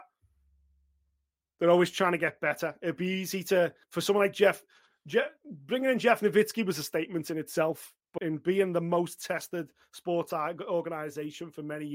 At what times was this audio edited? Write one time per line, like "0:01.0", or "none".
0:03.8
0:08.2